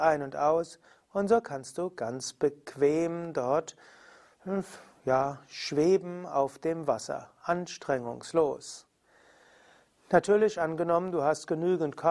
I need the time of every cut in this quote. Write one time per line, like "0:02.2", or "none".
none

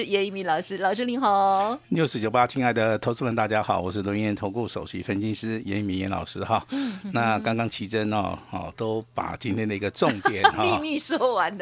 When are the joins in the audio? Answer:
none

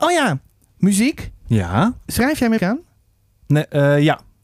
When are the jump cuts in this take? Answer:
0:02.6

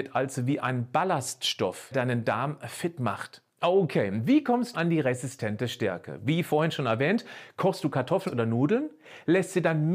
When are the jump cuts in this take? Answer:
0:01.9
0:04.7
0:08.3

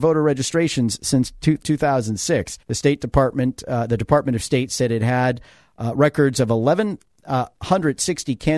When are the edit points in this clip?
0:01.6
0:02.6

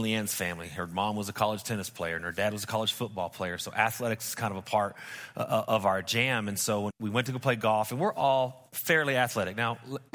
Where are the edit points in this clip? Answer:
0:06.9

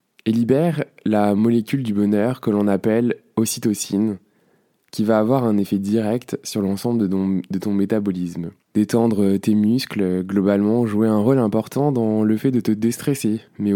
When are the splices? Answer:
0:08.6

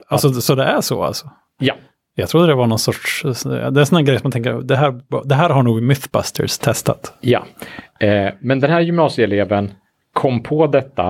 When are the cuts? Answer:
none

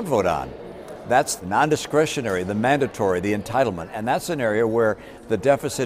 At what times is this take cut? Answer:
0:01.4

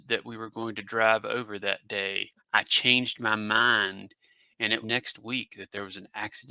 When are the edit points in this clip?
0:02.4
0:04.8

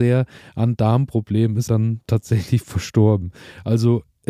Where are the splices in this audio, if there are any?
0:01.7

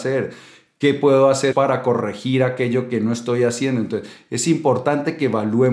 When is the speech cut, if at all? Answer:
0:01.5

